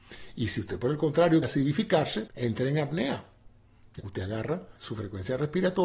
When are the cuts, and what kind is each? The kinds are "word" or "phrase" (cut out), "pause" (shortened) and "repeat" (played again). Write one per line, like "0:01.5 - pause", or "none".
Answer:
0:01.4 - word
0:02.3 - word
0:04.0 - word
0:04.8 - word